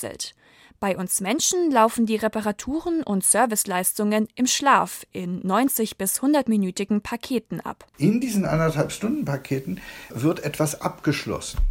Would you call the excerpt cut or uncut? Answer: cut